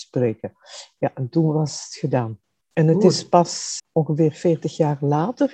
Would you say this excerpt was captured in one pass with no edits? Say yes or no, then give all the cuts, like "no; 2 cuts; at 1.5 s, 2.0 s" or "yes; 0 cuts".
no; 1 cut; at 3.8 s